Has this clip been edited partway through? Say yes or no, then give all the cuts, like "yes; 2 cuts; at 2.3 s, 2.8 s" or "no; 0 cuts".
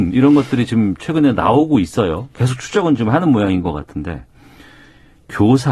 no; 0 cuts